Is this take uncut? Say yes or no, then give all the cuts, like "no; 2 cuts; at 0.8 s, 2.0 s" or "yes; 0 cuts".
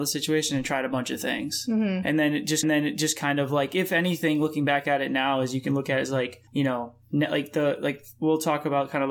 no; 2 cuts; at 2.6 s, 6.5 s